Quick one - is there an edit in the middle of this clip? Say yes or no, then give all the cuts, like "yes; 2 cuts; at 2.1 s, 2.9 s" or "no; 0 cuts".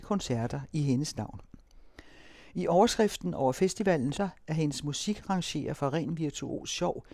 yes; 1 cut; at 4.1 s